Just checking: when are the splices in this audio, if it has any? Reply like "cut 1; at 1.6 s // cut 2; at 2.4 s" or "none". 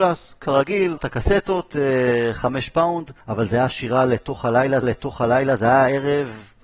cut 1; at 1.0 s // cut 2; at 3.2 s // cut 3; at 4.8 s